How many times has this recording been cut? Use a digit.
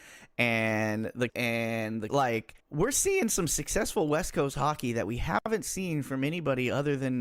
3